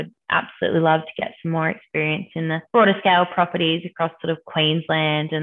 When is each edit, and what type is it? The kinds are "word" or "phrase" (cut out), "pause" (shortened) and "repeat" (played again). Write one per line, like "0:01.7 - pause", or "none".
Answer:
0:02.7 - pause